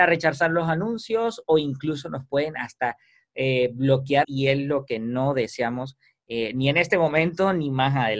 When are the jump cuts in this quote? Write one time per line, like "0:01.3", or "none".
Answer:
0:04.2